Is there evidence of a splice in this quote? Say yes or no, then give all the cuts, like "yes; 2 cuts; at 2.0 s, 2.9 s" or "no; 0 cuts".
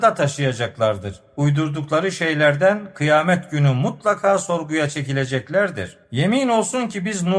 yes; 1 cut; at 6.0 s